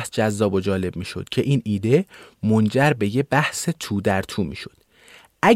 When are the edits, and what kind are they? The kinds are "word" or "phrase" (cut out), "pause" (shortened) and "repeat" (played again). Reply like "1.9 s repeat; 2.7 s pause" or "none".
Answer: none